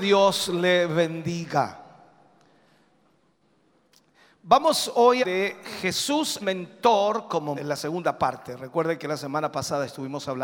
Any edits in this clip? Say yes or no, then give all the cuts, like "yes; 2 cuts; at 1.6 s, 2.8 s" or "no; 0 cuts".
yes; 3 cuts; at 5.2 s, 6.4 s, 7.6 s